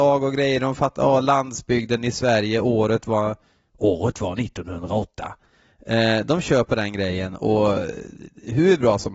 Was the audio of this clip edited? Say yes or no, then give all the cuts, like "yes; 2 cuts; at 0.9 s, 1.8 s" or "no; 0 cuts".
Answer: no; 0 cuts